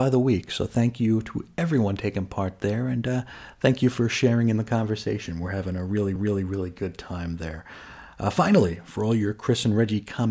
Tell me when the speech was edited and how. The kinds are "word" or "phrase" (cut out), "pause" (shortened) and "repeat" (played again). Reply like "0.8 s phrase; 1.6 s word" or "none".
6.2 s repeat